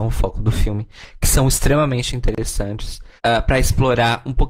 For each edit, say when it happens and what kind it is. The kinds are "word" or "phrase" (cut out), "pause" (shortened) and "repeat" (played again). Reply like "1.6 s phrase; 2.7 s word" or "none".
3.2 s pause